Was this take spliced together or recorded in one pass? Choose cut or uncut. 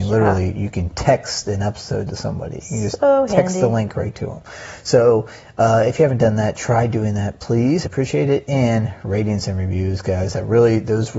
cut